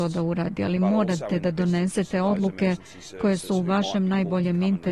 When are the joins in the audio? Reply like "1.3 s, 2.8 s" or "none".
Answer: none